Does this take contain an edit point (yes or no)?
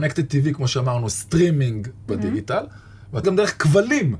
yes